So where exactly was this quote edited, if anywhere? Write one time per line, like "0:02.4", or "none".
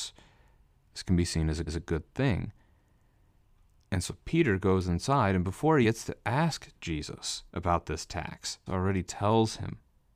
0:01.7
0:05.8
0:07.5
0:08.7